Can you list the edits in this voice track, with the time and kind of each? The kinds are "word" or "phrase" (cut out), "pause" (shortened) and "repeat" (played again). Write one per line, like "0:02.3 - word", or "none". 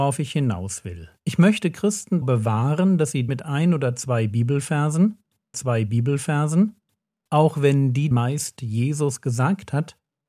0:01.2 - pause
0:02.2 - word
0:03.3 - word
0:05.5 - repeat
0:08.1 - word